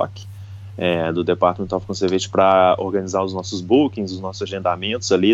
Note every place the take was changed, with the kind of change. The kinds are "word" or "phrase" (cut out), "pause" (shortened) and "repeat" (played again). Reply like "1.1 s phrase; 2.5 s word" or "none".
none